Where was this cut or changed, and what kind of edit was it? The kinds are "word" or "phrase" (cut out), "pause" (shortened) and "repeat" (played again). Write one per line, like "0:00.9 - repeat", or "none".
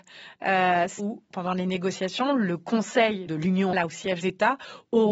0:01.0 - word
0:01.3 - word
0:03.3 - word
0:03.7 - word
0:04.2 - word